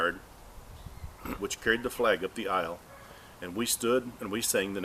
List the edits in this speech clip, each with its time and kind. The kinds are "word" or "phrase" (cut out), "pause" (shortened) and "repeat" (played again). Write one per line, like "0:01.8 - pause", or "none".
0:01.4 - word